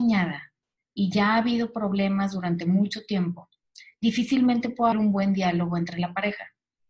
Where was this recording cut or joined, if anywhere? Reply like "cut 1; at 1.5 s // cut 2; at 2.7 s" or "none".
cut 1; at 4.9 s

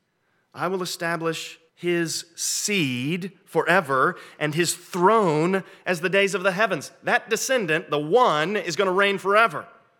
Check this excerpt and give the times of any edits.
cut 1; at 1.7 s

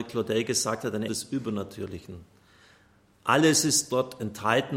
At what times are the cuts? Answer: cut 1; at 1.1 s

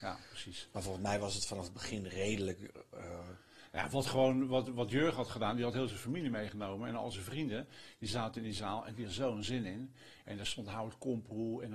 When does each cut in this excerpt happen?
cut 1; at 9.1 s

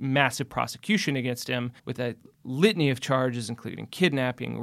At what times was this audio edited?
cut 1; at 1.8 s

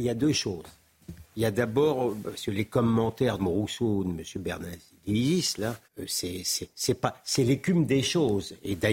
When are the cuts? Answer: cut 1; at 1.2 s // cut 2; at 3.4 s // cut 3; at 5.8 s

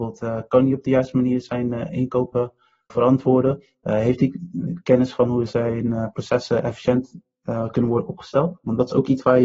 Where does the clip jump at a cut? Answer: cut 1; at 2.9 s

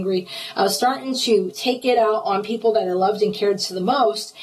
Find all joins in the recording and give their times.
none

